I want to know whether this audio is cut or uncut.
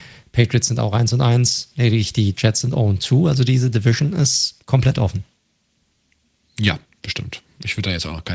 cut